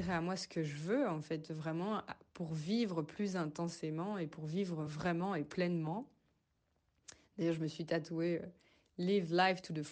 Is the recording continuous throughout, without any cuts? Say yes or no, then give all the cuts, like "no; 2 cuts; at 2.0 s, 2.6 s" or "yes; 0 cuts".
yes; 0 cuts